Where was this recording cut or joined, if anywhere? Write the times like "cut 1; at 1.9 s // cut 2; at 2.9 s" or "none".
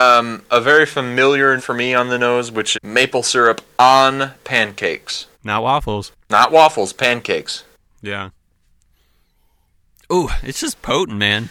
cut 1; at 1.6 s // cut 2; at 2.7 s // cut 3; at 5.3 s // cut 4; at 6.2 s // cut 5; at 7.8 s